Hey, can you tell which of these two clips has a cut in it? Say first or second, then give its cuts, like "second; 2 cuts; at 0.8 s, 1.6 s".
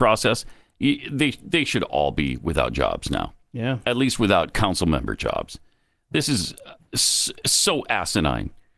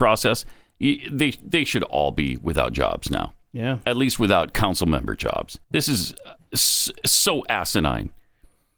second; 1 cut; at 5.6 s